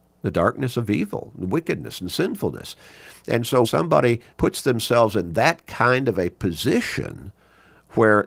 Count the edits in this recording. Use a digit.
2